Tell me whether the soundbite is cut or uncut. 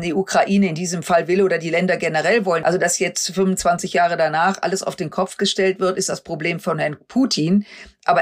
uncut